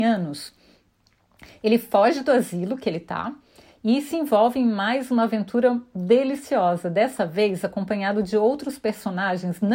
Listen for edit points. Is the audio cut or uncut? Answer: uncut